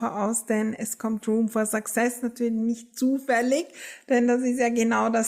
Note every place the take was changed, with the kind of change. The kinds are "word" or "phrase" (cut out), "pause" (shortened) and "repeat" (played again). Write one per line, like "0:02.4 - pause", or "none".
none